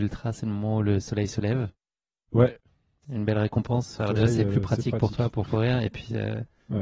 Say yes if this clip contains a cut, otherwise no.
no